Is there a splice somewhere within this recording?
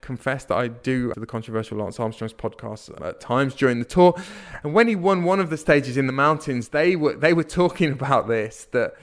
yes; 2 cuts; at 1.1 s, 3.0 s

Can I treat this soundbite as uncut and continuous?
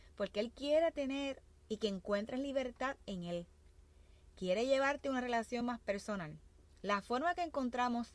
yes; 0 cuts

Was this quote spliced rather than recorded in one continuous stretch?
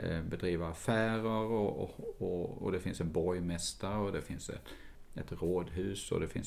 no; 0 cuts

